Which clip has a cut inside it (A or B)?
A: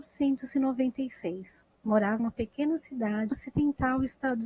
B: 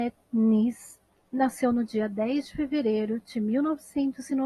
A